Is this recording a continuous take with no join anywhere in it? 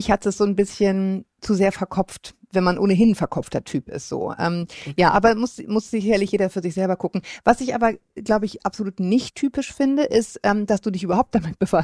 yes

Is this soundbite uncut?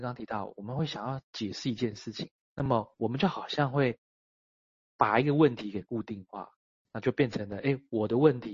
yes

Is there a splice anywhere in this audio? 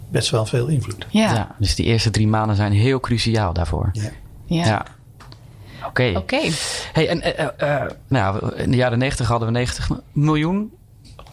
no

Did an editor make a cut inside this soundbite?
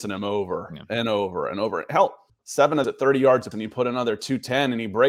yes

